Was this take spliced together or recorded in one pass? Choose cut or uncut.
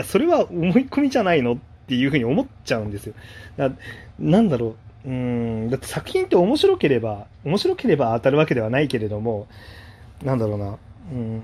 cut